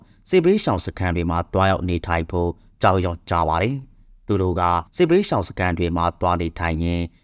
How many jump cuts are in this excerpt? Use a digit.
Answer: 1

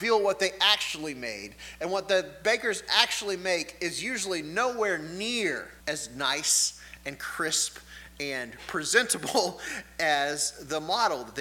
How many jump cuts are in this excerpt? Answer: 1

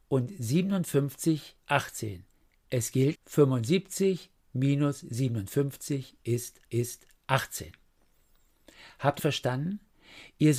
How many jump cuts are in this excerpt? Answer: 4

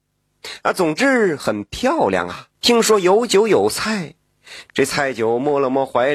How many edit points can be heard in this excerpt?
1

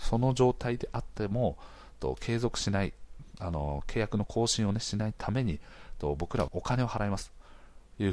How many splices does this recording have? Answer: 1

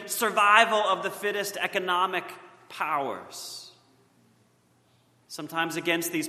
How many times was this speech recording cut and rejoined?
0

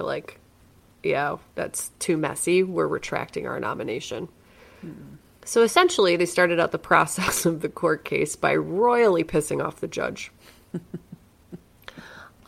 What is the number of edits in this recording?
0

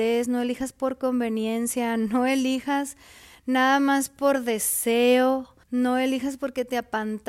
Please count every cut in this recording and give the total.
1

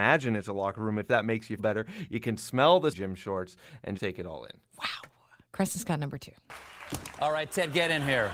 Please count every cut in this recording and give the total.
4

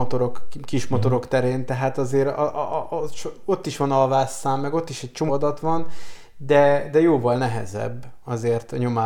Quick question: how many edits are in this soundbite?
1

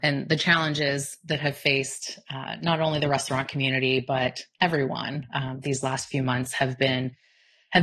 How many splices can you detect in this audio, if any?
0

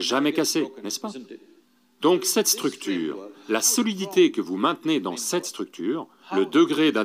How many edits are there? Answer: 1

